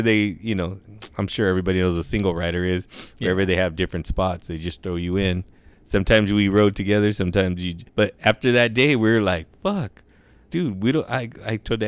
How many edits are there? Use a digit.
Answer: 2